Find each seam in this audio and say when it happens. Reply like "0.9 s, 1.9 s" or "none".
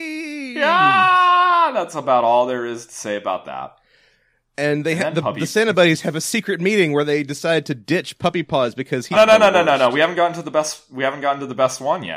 9.1 s